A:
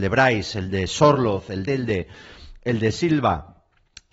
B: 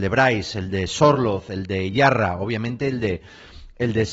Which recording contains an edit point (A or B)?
A